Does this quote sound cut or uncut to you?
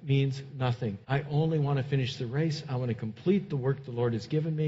cut